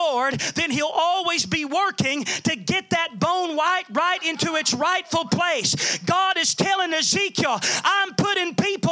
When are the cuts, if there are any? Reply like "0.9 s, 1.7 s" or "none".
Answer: none